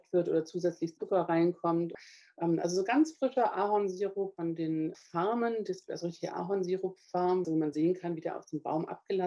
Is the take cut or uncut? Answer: uncut